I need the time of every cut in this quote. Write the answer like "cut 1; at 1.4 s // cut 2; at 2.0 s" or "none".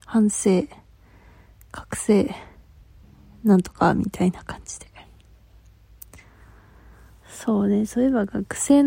cut 1; at 3.0 s

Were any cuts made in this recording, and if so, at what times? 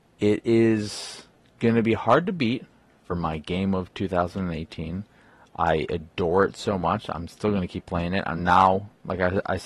none

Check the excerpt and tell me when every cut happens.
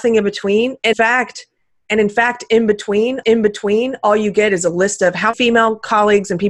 cut 1; at 0.9 s // cut 2; at 3.2 s // cut 3; at 5.3 s

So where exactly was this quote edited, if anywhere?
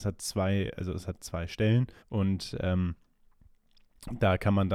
cut 1; at 2.0 s

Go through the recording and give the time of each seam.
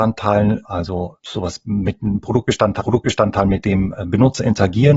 cut 1; at 1.2 s // cut 2; at 2.8 s

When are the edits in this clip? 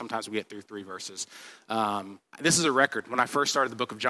cut 1; at 2.3 s

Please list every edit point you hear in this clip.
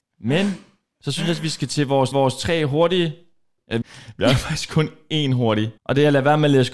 cut 1; at 2.1 s // cut 2; at 3.8 s // cut 3; at 5.8 s

